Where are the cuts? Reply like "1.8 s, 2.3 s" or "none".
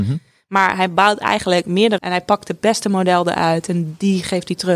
2.0 s

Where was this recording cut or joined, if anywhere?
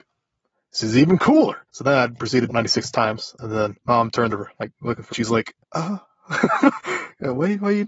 1.7 s, 2.5 s, 3.8 s, 4.3 s, 5.1 s, 5.6 s

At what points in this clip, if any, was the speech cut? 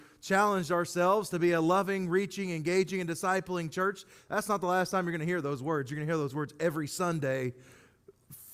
none

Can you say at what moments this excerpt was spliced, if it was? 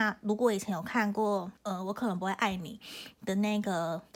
1.6 s

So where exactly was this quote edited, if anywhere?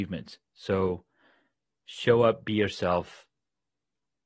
none

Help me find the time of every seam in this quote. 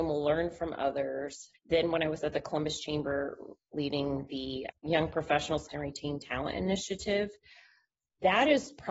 1.6 s, 4.7 s, 5.7 s

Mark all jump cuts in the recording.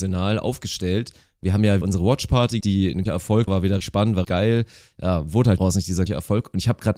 1.8 s, 2.6 s, 3.1 s, 3.5 s, 3.8 s, 4.2 s, 5.6 s, 6.1 s

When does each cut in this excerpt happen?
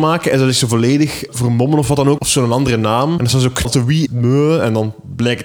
1.3 s, 2.2 s, 3.2 s, 3.6 s, 4.1 s

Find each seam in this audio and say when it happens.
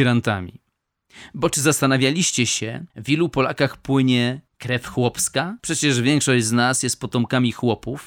2.9 s, 4.5 s, 5.6 s

